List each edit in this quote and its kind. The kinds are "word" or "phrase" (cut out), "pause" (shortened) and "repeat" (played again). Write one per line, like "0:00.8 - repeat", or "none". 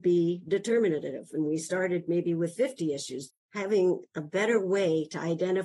0:03.4 - pause